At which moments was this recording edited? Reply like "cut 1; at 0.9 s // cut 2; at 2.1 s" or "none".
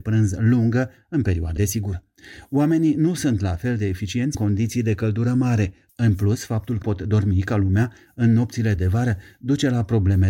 cut 1; at 1.6 s // cut 2; at 4.3 s // cut 3; at 6.8 s // cut 4; at 8.8 s